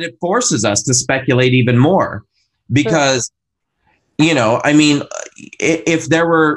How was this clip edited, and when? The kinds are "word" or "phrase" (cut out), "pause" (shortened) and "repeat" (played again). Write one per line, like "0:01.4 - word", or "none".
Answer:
none